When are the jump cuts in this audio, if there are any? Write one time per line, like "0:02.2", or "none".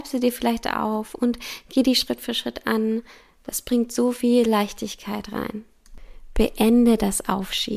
none